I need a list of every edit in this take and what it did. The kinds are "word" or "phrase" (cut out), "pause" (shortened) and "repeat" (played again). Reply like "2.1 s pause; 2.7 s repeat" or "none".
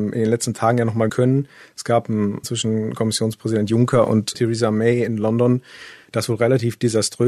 1.1 s word; 2.4 s word; 4.3 s word